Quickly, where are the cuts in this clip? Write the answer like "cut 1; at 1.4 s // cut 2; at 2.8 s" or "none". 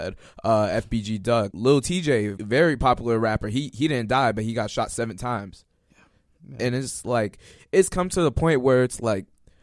cut 1; at 1.5 s // cut 2; at 2.4 s